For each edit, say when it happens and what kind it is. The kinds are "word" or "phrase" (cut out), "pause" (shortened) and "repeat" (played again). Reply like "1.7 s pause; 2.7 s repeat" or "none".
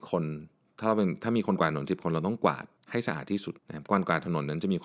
2.8 s pause; 3.6 s pause